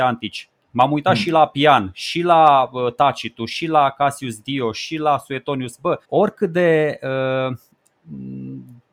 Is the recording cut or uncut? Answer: cut